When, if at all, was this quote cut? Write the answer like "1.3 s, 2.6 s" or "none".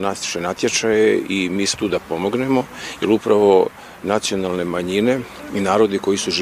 1.8 s